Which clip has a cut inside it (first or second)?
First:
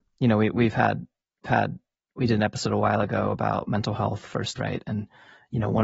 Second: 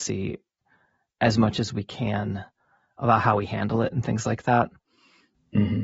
first